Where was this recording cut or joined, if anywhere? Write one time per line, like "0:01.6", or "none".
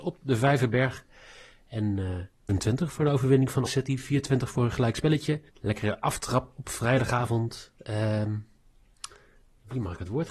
0:02.5
0:03.7
0:05.5